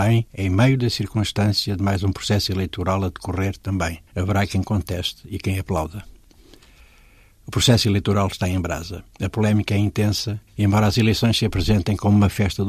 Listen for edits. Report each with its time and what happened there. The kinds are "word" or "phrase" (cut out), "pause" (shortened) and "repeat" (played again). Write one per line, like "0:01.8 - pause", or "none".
0:04.1 - pause
0:09.1 - pause
0:10.5 - pause